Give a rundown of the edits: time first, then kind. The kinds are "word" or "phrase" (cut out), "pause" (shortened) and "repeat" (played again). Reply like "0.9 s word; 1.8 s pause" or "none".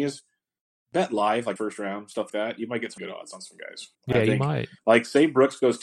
1.6 s phrase; 2.3 s word; 3.0 s word; 3.9 s pause; 4.8 s pause